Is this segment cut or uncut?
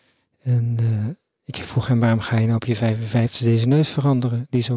uncut